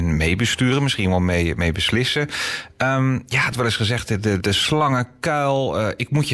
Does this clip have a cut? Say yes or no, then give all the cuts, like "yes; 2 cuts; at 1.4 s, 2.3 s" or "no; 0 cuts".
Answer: yes; 2 cuts; at 3.5 s, 4.4 s